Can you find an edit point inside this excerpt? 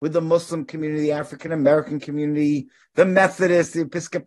no; 0 cuts

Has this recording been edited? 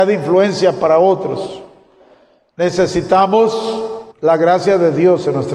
yes; 1 cut; at 4.1 s

